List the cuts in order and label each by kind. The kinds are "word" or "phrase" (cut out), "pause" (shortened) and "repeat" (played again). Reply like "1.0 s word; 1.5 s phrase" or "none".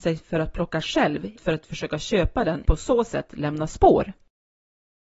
1.4 s word; 2.7 s phrase